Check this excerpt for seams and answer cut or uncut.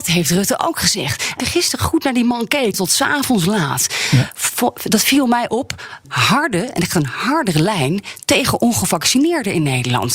cut